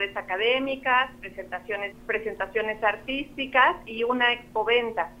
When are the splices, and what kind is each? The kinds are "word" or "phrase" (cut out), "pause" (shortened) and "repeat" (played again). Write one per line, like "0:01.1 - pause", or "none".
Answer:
0:01.9 - phrase